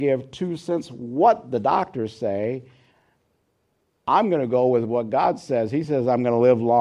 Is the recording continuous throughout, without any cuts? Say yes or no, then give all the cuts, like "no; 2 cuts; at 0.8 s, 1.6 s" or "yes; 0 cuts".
yes; 0 cuts